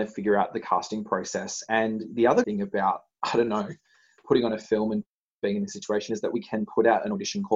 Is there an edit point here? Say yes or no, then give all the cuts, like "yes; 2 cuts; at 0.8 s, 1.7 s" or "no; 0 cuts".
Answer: yes; 1 cut; at 2.4 s